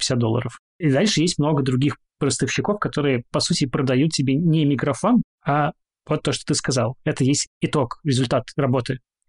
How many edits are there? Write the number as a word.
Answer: zero